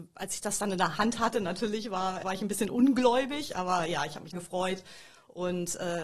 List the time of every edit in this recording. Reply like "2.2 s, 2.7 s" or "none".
2.2 s, 4.3 s